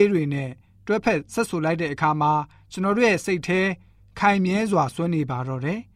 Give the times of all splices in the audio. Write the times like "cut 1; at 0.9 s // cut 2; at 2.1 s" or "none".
none